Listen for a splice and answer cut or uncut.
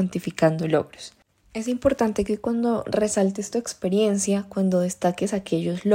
uncut